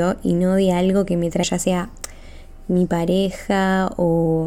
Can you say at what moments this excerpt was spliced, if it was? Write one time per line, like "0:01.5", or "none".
0:01.4